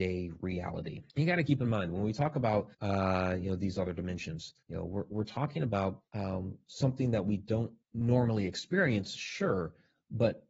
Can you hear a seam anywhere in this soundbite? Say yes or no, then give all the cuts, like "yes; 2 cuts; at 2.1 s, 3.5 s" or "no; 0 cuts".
yes; 5 cuts; at 1.1 s, 2.7 s, 4.6 s, 6.1 s, 7.8 s